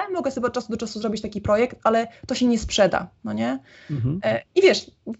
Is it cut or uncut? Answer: uncut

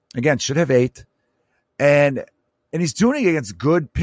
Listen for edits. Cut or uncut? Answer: uncut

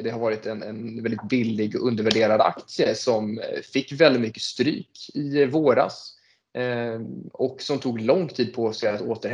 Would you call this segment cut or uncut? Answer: uncut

